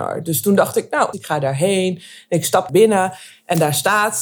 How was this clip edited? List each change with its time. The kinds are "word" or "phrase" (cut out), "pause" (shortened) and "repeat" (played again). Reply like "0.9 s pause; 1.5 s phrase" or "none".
1.1 s word; 2.7 s word